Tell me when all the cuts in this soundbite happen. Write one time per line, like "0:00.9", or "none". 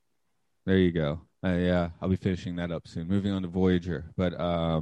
0:01.3